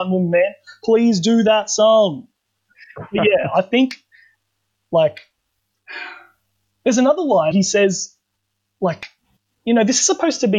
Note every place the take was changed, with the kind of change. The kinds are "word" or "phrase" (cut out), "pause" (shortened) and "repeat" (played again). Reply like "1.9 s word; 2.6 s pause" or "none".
7.5 s phrase

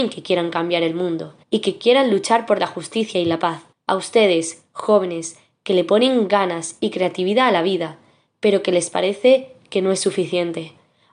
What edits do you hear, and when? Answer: 1.4 s pause; 3.7 s pause

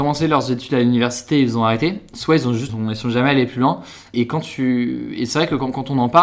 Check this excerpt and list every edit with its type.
2.7 s phrase; 4.1 s word

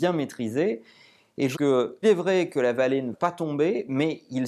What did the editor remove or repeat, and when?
1.5 s word; 2.0 s word; 3.1 s word

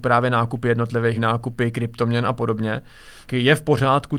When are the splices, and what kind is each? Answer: 1.2 s word; 3.3 s word

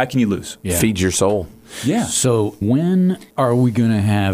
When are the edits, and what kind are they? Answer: 2.6 s word; 3.3 s pause

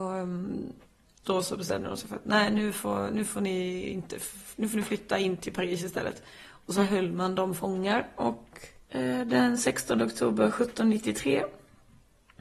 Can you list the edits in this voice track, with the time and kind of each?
8.8 s pause

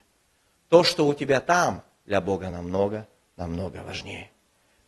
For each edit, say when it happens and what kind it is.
none

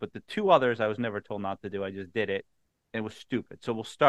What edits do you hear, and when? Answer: none

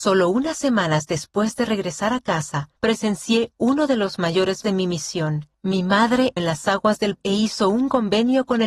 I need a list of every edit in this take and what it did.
2.8 s pause; 4.6 s word; 5.5 s pause; 6.4 s word; 7.1 s word

